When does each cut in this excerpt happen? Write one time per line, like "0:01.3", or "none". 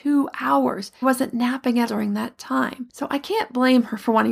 0:01.0
0:01.9